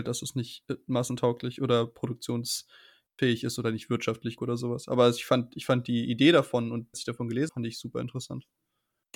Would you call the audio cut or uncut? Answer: cut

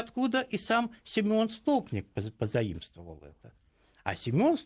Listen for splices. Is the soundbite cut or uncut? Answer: uncut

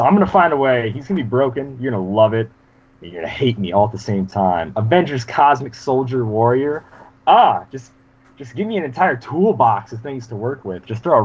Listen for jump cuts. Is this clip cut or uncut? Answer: uncut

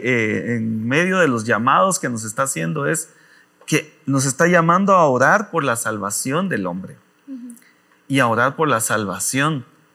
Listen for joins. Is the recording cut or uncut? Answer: uncut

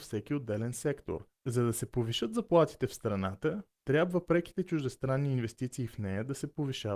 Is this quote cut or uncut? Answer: cut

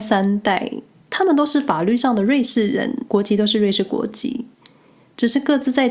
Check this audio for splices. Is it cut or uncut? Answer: uncut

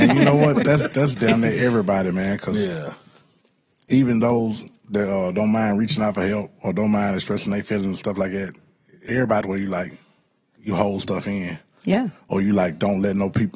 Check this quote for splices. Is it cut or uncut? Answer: cut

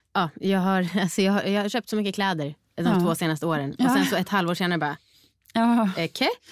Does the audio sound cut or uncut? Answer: uncut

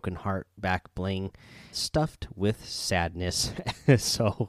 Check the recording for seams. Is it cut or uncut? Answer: cut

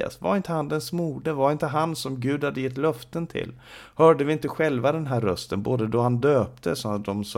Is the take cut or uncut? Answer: uncut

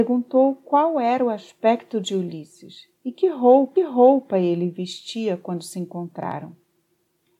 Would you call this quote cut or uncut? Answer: cut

